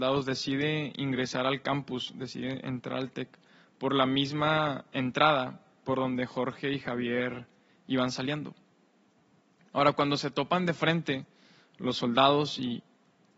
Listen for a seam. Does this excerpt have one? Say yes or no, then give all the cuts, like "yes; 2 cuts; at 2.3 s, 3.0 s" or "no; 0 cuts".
no; 0 cuts